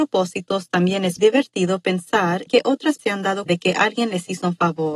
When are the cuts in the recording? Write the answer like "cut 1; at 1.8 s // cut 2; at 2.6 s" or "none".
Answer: cut 1; at 1.2 s // cut 2; at 2.5 s // cut 3; at 3.0 s // cut 4; at 3.5 s